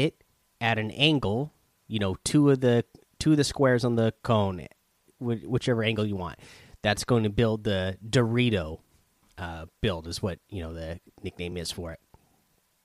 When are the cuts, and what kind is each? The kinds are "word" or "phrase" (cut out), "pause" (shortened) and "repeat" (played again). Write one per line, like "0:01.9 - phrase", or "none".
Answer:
none